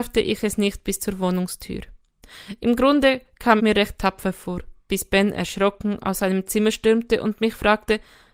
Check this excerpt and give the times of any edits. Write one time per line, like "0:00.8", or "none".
0:03.6
0:04.8